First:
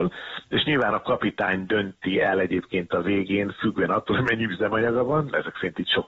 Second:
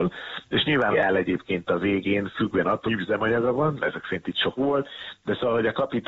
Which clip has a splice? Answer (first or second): second